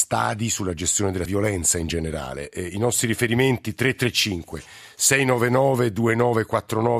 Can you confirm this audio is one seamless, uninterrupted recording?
no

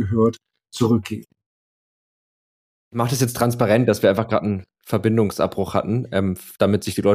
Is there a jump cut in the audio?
no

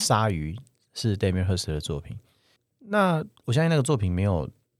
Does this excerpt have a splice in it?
yes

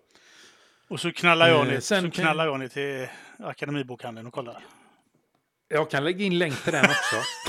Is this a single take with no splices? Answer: yes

